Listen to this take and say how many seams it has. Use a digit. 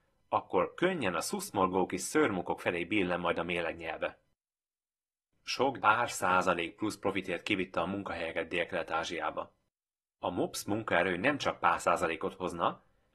1